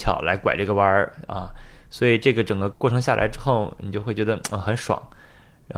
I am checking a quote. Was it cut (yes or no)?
no